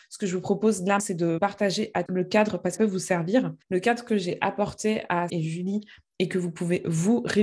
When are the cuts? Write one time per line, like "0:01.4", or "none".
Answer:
0:01.0
0:01.4
0:02.1
0:02.8
0:03.6
0:05.3